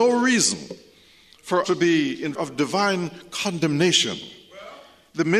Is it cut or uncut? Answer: cut